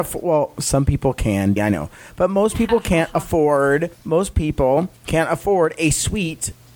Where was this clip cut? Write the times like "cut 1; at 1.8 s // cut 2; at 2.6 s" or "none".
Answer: cut 1; at 1.6 s // cut 2; at 3.9 s // cut 3; at 5.0 s

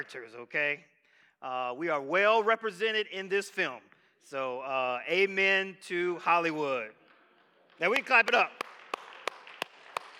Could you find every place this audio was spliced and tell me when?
none

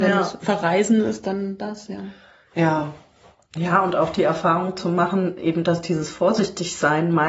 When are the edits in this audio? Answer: none

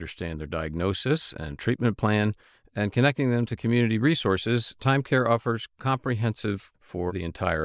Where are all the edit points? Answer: cut 1; at 6.7 s

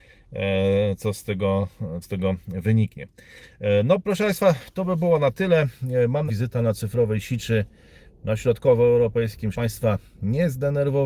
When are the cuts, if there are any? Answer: cut 1; at 2.0 s // cut 2; at 6.3 s // cut 3; at 9.5 s

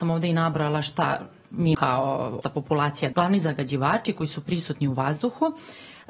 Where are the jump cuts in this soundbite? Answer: cut 1; at 1.7 s // cut 2; at 2.4 s // cut 3; at 3.1 s

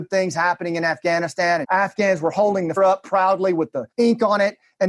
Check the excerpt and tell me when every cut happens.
cut 1; at 1.6 s // cut 2; at 2.8 s // cut 3; at 3.9 s

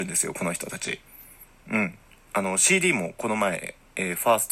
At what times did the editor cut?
none

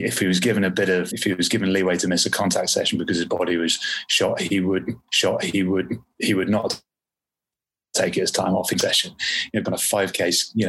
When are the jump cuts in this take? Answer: cut 1; at 1.1 s // cut 2; at 5.1 s // cut 3; at 9.6 s

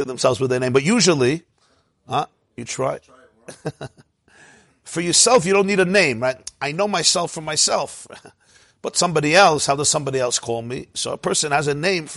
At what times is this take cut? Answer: none

